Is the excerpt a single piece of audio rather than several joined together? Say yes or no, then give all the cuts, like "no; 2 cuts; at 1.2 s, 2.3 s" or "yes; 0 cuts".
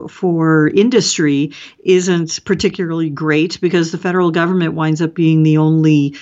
yes; 0 cuts